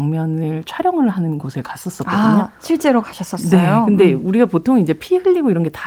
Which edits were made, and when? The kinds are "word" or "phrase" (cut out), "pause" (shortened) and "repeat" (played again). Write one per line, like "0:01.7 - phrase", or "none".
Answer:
none